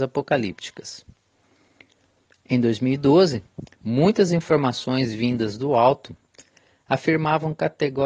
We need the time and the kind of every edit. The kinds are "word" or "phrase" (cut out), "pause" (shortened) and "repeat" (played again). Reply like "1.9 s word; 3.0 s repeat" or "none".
none